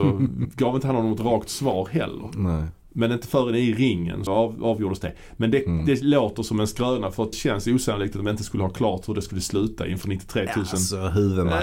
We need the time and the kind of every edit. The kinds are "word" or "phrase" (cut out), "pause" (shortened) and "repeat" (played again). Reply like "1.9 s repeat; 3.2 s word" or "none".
2.8 s pause; 4.3 s word; 7.3 s word